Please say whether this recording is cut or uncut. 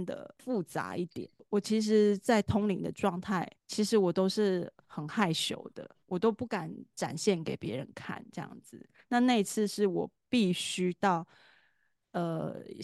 cut